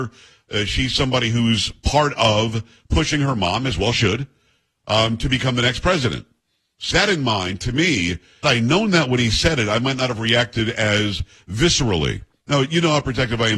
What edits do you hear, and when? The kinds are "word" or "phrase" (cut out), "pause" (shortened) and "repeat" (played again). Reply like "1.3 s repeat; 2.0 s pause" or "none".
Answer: 3.9 s word; 6.9 s word; 8.4 s word